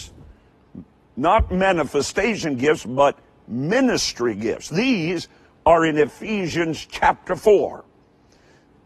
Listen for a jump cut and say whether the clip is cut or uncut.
uncut